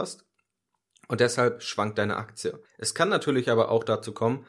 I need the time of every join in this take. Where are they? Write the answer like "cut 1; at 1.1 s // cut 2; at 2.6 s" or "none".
cut 1; at 2.6 s